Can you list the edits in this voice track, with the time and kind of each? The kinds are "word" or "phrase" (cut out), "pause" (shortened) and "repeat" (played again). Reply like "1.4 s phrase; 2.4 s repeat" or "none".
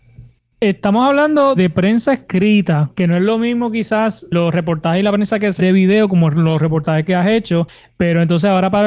1.6 s word; 5.6 s phrase; 7.1 s word